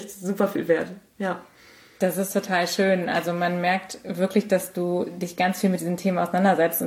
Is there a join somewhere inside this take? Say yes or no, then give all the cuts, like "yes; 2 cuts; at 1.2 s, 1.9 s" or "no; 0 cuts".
no; 0 cuts